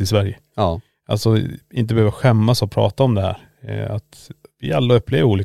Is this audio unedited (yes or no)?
yes